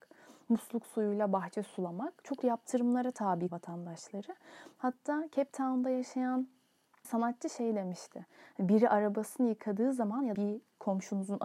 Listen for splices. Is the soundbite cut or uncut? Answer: cut